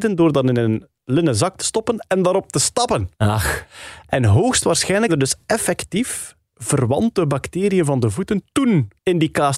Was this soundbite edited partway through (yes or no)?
yes